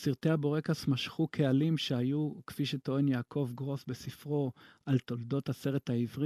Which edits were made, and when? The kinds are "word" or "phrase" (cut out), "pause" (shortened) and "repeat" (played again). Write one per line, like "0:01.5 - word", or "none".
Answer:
none

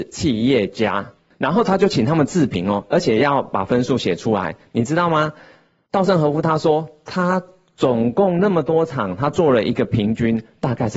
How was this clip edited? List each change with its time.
none

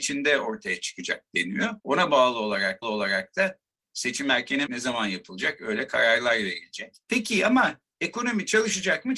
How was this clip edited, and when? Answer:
0:01.8 - pause
0:02.8 - repeat
0:04.7 - word
0:07.0 - pause
0:07.9 - pause

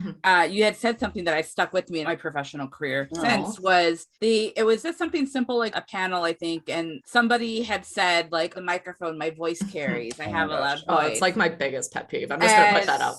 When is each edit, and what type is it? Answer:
0:02.0 - phrase
0:04.1 - pause
0:04.8 - word
0:05.7 - word
0:07.0 - word
0:08.5 - phrase

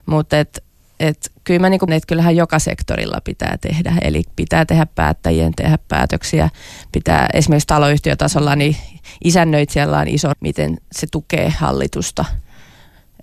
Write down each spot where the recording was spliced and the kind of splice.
0:01.9 - word
0:10.3 - word

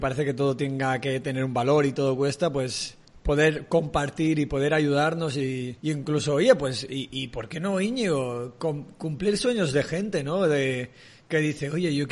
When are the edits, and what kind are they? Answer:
0:03.0 - pause
0:05.8 - pause

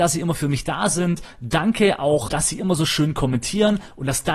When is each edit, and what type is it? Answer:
0:02.3 - word

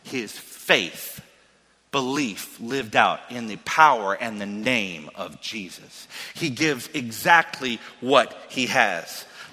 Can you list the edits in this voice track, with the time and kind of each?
none

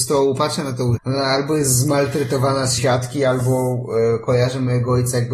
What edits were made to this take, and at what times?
0:01.0 - word
0:02.8 - phrase

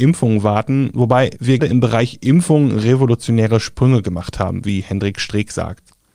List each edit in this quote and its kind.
0:01.6 - word

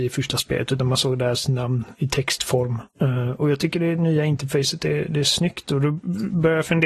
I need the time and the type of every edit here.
0:02.9 - pause

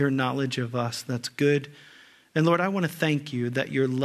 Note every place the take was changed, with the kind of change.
none

